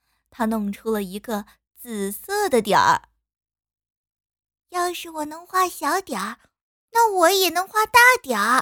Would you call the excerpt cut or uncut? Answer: uncut